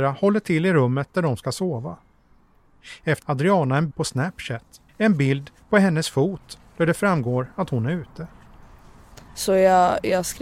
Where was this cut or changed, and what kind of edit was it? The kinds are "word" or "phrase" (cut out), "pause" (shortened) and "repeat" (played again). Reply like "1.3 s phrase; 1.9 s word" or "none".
3.2 s phrase; 3.9 s word; 4.9 s pause